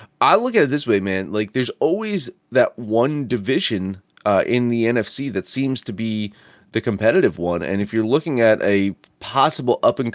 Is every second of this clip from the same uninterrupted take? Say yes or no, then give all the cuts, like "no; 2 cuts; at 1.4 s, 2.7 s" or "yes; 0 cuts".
yes; 0 cuts